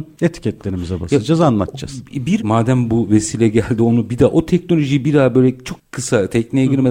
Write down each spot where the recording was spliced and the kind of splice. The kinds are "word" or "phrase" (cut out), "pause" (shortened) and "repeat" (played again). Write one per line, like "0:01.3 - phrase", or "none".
0:02.4 - word